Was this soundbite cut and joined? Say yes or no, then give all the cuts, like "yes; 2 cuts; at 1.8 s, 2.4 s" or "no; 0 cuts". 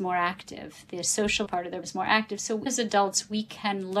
yes; 3 cuts; at 1.4 s, 1.8 s, 2.7 s